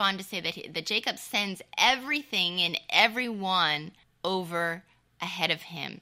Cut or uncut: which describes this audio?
cut